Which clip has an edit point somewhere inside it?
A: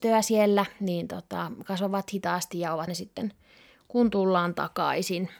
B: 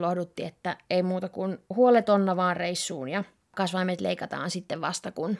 A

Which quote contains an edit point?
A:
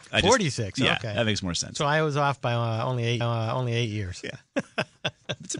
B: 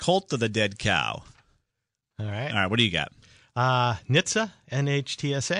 A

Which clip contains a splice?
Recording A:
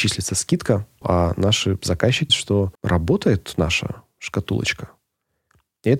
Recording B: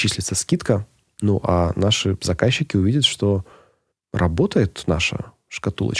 A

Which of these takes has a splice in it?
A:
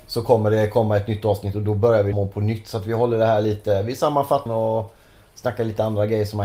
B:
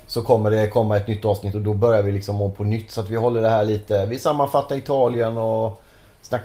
A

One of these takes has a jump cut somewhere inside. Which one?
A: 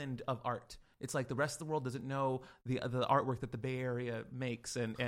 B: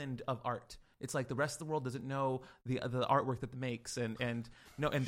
B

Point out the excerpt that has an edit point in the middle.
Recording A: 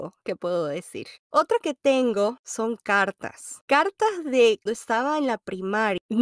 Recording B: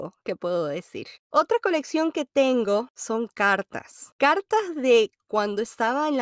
A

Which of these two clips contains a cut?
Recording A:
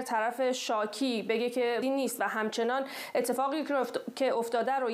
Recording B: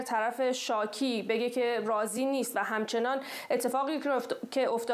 A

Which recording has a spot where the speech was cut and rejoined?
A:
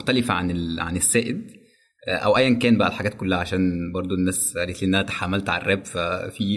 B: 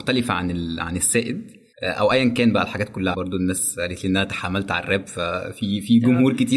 B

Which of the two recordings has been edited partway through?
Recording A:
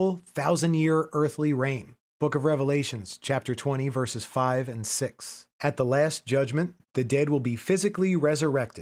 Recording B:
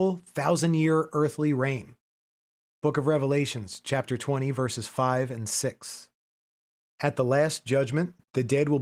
A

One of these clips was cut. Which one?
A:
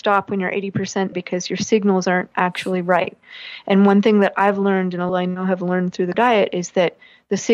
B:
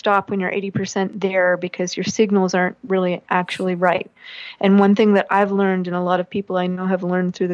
A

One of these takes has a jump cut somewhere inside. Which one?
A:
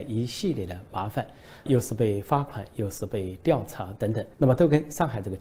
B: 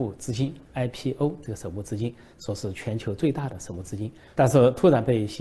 A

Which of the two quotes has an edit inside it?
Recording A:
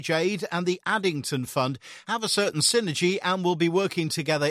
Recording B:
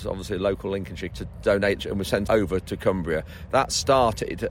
B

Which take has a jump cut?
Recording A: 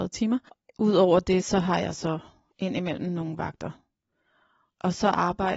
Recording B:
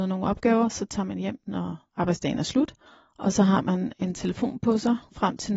B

